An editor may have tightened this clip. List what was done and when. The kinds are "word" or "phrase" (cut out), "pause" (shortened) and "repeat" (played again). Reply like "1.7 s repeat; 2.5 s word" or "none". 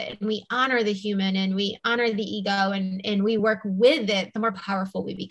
none